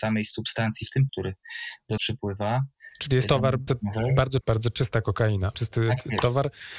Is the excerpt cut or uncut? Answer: cut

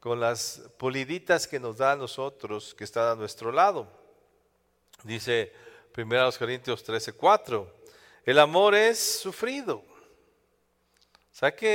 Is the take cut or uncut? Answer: uncut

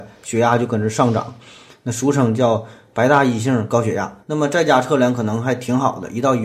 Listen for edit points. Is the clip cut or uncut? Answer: cut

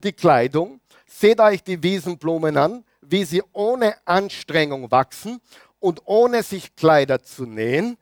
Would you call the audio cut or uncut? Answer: uncut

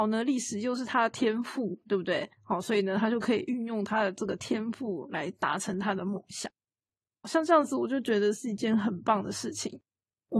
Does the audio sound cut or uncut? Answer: cut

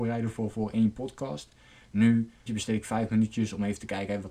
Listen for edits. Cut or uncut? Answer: cut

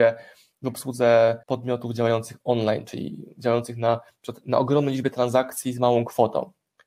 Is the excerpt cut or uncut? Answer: cut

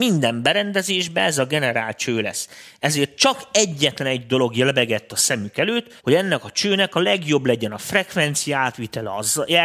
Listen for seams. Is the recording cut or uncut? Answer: cut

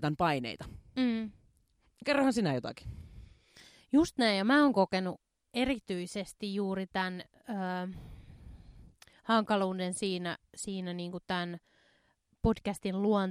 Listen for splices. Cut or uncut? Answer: uncut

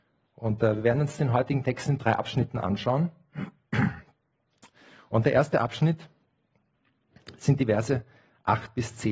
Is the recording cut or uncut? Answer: uncut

